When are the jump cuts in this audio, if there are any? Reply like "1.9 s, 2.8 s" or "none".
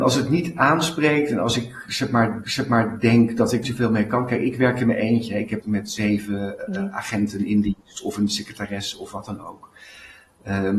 2.4 s, 3.6 s, 5.6 s, 6.6 s

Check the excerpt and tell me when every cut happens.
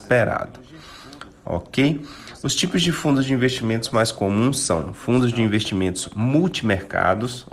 none

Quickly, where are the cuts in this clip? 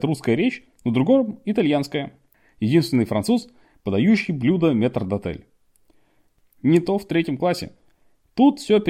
none

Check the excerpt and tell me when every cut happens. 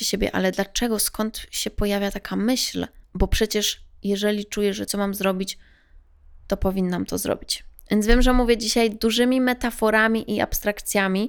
4.9 s

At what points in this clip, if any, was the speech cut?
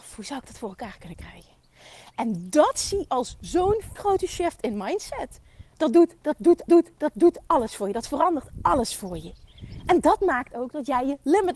3.1 s, 4.0 s, 5.7 s, 6.7 s

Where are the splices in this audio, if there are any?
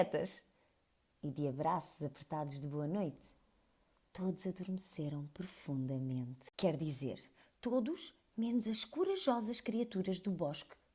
none

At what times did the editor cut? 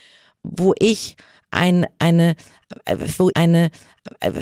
3.3 s

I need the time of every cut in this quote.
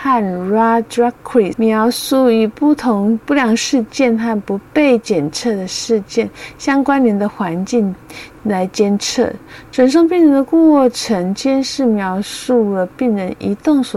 1.5 s

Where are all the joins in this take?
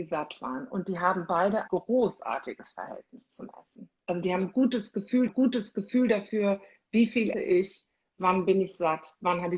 1.7 s, 5.3 s, 7.3 s

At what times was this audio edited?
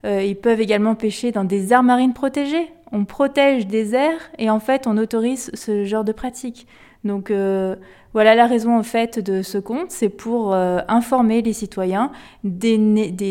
none

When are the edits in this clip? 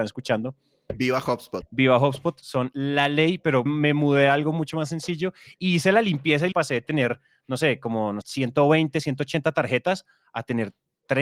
1.6 s, 3.7 s, 6.5 s, 8.2 s

